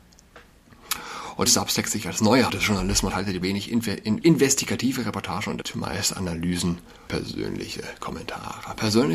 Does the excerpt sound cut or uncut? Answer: cut